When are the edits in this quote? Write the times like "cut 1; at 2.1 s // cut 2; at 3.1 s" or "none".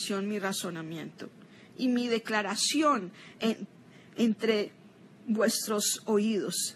none

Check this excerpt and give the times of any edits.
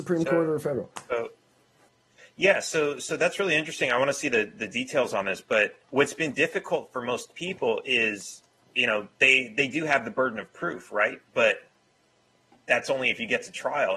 cut 1; at 1.9 s // cut 2; at 5.8 s

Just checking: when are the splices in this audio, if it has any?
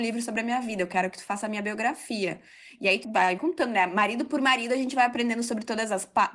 cut 1; at 3.0 s // cut 2; at 3.4 s

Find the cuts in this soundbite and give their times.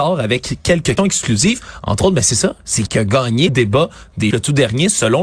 cut 1; at 1.0 s // cut 2; at 2.9 s // cut 3; at 3.5 s // cut 4; at 4.3 s

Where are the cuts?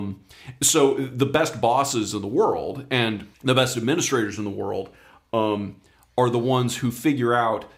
cut 1; at 3.3 s

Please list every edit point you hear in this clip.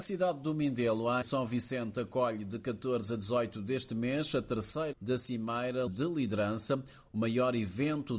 cut 1; at 1.2 s // cut 2; at 4.9 s // cut 3; at 5.9 s

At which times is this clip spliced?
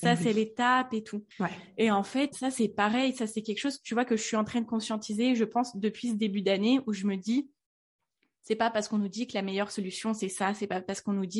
cut 1; at 1.3 s // cut 2; at 2.3 s

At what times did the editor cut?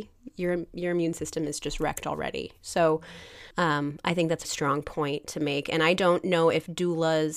cut 1; at 3.5 s // cut 2; at 4.4 s

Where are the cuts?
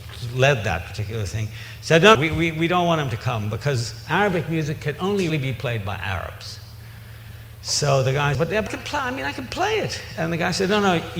cut 1; at 2.1 s // cut 2; at 5.3 s // cut 3; at 8.3 s // cut 4; at 8.7 s

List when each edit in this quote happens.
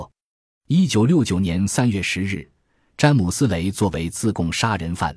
none

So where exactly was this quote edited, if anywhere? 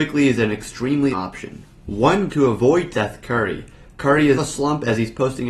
cut 1; at 1.1 s // cut 2; at 2.3 s // cut 3; at 2.9 s // cut 4; at 4.4 s

